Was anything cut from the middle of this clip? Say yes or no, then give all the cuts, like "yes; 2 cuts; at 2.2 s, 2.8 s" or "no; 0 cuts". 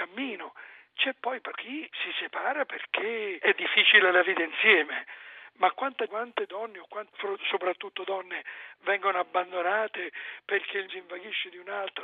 yes; 6 cuts; at 1.5 s, 1.9 s, 3.4 s, 6.1 s, 7.1 s, 10.9 s